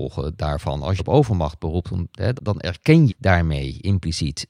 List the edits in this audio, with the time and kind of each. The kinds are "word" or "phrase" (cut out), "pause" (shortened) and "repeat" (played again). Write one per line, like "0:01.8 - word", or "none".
0:01.0 - word
0:02.4 - word
0:03.1 - word